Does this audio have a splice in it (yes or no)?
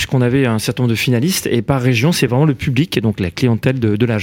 no